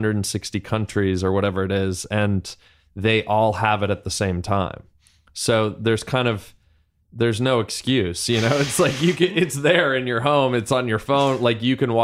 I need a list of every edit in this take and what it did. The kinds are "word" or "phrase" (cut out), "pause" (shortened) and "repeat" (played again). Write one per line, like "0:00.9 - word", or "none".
none